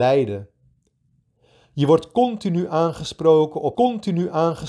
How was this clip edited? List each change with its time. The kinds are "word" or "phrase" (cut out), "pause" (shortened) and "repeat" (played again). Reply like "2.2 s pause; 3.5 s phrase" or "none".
3.7 s repeat

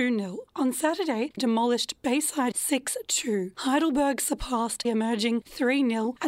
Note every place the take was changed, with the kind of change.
1.4 s word; 2.5 s word; 4.8 s word

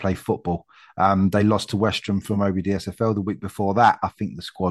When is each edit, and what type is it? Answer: none

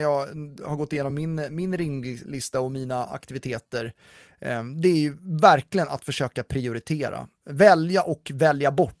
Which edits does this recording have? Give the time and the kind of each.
none

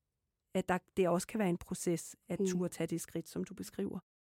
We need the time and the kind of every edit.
none

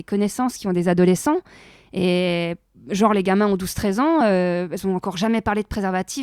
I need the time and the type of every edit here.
none

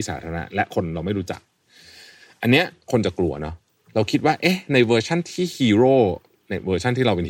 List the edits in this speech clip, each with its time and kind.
none

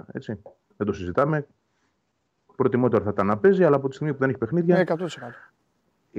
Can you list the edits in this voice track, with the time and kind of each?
none

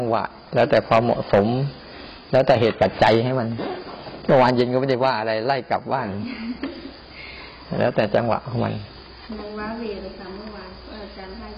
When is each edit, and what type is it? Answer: none

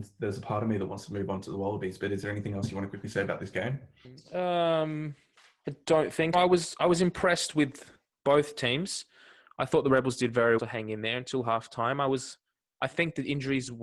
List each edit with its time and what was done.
6.3 s word; 10.6 s word

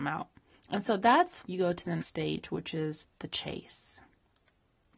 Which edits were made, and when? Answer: 1.4 s word; 2.0 s word

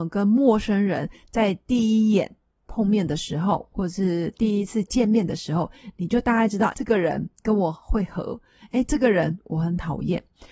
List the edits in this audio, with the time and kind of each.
6.7 s word

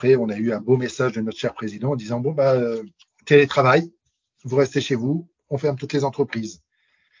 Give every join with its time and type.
none

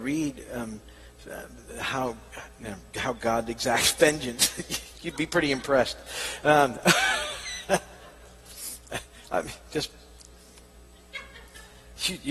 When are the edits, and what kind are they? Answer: none

